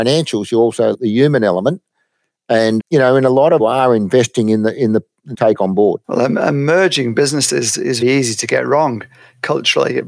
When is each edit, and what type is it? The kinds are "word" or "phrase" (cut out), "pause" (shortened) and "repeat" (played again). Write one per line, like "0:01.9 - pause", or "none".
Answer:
0:00.9 - word
0:02.8 - word
0:03.6 - phrase
0:05.3 - phrase
0:06.0 - pause
0:08.0 - word

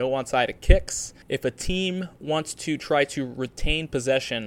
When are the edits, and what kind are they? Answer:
0:01.2 - pause

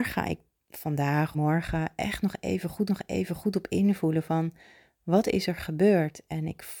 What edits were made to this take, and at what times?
0:01.3 - phrase
0:02.9 - repeat

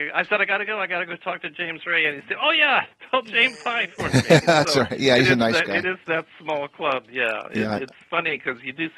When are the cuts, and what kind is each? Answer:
none

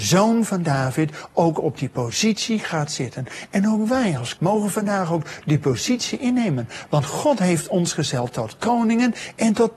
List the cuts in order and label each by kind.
0:04.4 - word

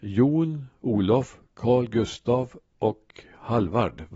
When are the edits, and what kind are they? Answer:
none

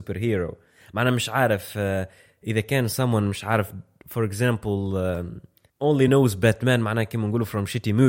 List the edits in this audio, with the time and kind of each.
none

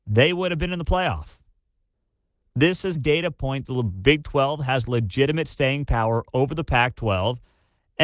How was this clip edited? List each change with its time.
0:01.9 - pause
0:02.9 - word
0:03.6 - phrase

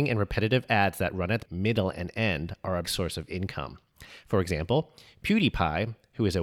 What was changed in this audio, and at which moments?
0:01.5 - word
0:02.8 - word

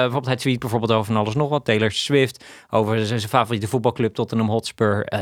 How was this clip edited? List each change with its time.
none

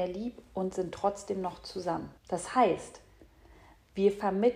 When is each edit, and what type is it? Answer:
0:02.2 - pause

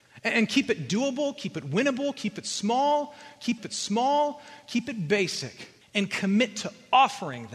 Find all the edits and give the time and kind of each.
0:03.6 - repeat
0:05.8 - pause

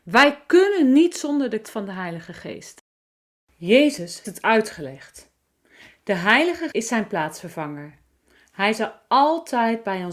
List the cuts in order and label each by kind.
0:01.6 - word
0:04.2 - word
0:06.7 - word

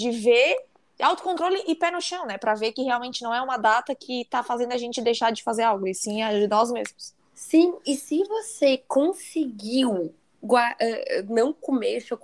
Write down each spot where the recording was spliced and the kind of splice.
none

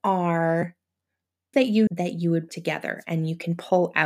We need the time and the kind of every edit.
0:01.5 - word
0:01.9 - word
0:02.5 - word

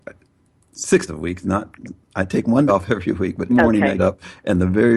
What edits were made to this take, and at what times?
0:01.1 - word
0:02.7 - word
0:03.5 - word
0:04.0 - word

